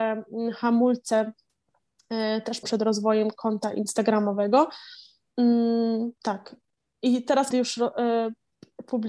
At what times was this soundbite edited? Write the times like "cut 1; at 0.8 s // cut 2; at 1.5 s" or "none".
cut 1; at 2.6 s // cut 2; at 6.2 s // cut 3; at 7.5 s